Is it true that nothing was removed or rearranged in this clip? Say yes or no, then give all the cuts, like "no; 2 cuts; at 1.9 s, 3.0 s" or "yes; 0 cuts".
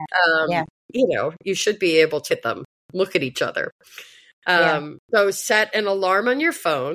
no; 2 cuts; at 2.3 s, 5.0 s